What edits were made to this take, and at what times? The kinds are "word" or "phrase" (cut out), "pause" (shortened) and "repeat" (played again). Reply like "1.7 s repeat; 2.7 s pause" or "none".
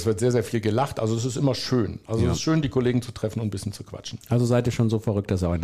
none